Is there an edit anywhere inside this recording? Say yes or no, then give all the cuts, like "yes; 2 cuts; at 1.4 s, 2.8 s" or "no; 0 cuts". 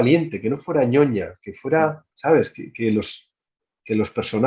yes; 1 cut; at 2.1 s